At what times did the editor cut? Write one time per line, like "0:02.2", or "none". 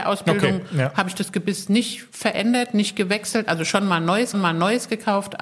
0:04.3

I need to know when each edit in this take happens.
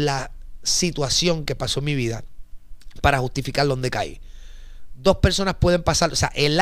none

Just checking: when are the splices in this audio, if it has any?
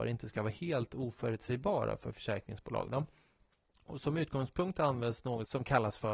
none

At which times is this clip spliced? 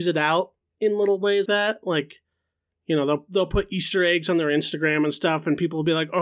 0:01.5

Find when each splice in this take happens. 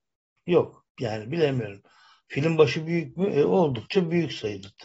none

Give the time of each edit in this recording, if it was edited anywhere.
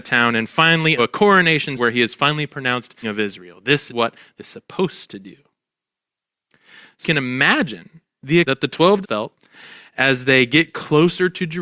0:01.0
0:01.8
0:03.0
0:03.9
0:04.4
0:07.0
0:08.4
0:09.0

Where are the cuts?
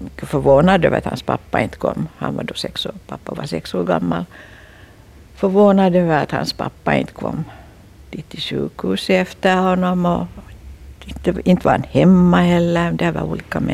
none

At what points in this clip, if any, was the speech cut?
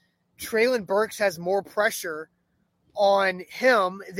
none

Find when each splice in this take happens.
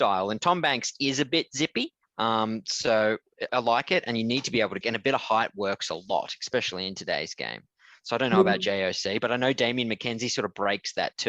0:02.0
0:03.5
0:04.8

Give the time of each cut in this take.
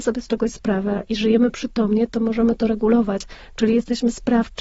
none

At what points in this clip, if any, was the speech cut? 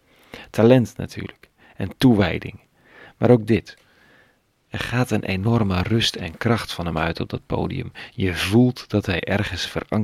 none

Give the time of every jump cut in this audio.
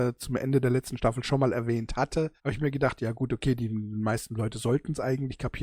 0:02.4

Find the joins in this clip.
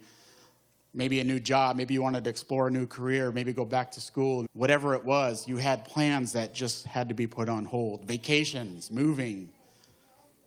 0:04.4

